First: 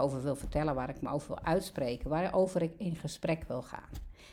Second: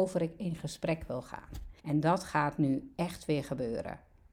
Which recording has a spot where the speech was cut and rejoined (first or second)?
second